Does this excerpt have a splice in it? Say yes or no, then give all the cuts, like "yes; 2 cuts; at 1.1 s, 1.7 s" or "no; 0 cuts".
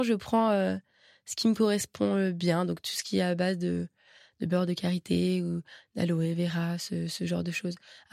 no; 0 cuts